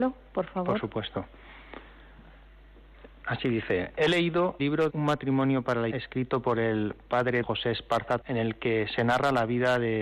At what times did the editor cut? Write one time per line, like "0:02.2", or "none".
0:04.6
0:04.9
0:05.9
0:07.4
0:08.2